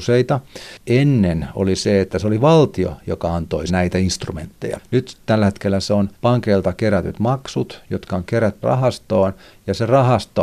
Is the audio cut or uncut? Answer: cut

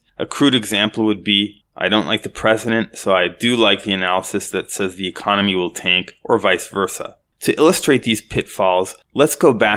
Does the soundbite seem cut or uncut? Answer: uncut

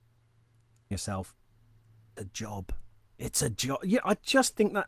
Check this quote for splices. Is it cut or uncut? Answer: cut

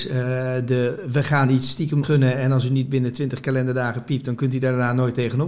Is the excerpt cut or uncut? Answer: cut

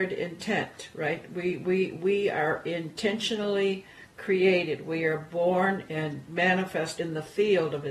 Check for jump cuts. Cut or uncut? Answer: cut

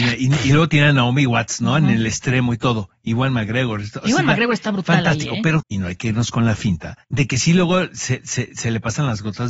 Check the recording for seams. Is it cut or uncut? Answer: cut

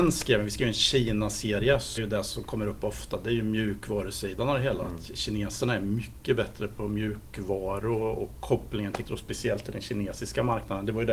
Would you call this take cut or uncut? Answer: cut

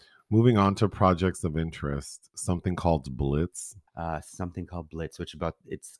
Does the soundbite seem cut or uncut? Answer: cut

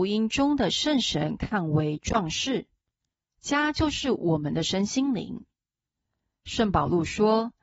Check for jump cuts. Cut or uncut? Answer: cut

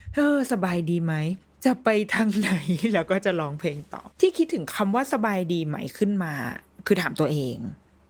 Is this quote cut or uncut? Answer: cut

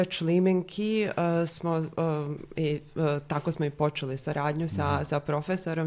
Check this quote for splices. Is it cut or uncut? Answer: uncut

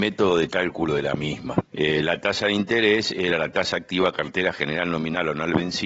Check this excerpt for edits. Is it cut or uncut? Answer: cut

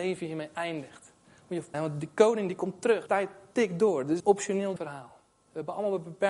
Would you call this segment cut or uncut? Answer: cut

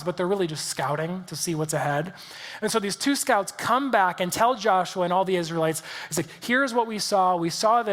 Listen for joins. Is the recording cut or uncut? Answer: uncut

